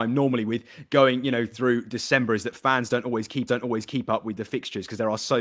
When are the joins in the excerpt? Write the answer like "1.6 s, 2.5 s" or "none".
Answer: 3.5 s